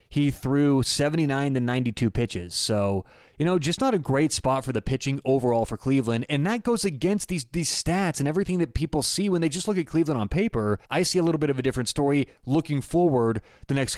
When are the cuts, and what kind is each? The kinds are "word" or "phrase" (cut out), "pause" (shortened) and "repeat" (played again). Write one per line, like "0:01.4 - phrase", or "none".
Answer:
0:10.8 - pause